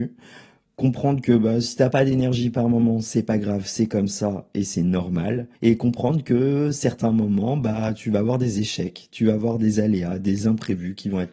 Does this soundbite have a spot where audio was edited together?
yes; 1 cut; at 5.5 s

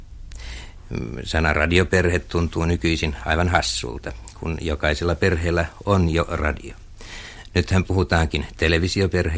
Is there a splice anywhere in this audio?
no; 0 cuts

